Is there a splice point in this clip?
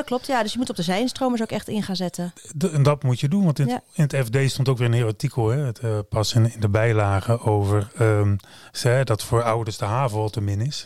no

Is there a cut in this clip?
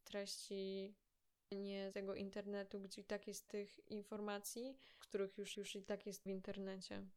yes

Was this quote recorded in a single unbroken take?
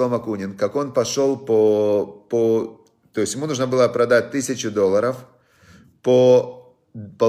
yes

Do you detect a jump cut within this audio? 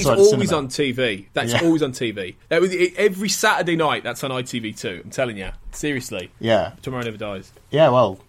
yes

